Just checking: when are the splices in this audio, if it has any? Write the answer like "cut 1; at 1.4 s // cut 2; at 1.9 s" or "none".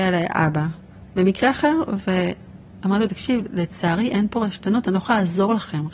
none